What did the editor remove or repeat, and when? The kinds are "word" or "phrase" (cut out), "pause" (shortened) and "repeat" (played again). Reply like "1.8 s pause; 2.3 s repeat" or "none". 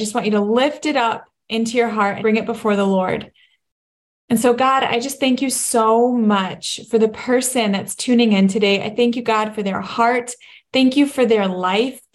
2.2 s word